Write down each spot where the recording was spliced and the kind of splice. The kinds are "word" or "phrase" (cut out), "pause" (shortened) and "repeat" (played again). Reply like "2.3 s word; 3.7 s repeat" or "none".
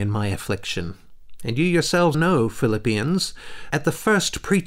2.1 s word; 3.7 s word